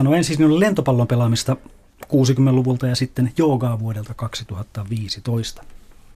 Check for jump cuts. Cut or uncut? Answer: uncut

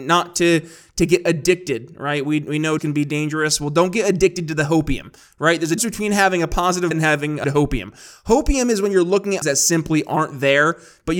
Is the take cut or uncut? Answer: cut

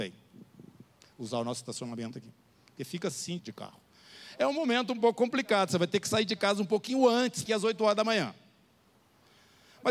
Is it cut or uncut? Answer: cut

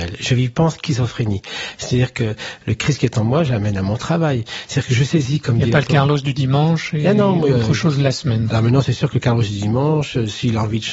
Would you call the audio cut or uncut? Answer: uncut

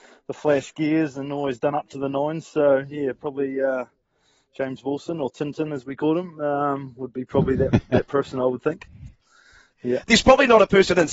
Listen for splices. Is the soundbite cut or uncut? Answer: uncut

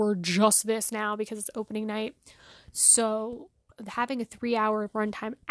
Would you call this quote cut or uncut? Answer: uncut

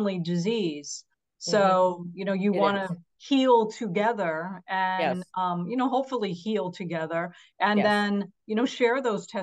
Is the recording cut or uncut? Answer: uncut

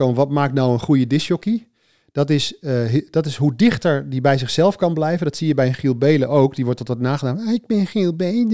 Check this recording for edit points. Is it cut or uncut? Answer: uncut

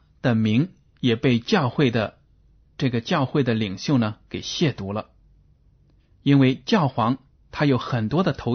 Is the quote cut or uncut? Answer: uncut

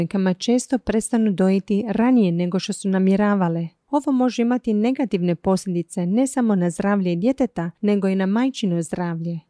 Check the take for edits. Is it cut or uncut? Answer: uncut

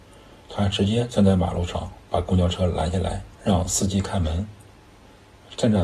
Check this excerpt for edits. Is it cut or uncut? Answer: cut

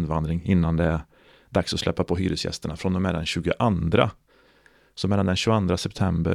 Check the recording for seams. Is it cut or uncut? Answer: uncut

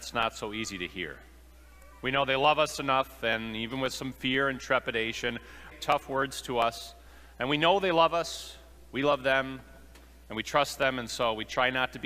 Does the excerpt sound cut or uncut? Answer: cut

